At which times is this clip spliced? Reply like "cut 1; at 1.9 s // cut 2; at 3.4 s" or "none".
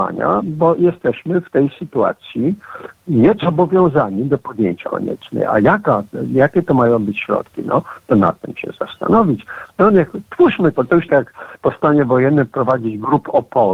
cut 1; at 3.4 s // cut 2; at 4.8 s // cut 3; at 8.6 s // cut 4; at 10.7 s // cut 5; at 11.1 s